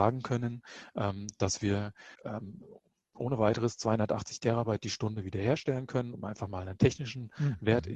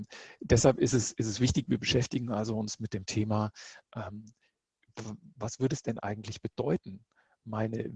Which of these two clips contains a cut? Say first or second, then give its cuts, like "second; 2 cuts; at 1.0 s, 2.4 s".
first; 1 cut; at 2.1 s